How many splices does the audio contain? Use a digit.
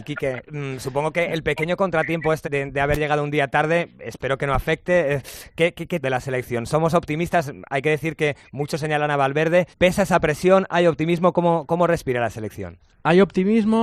3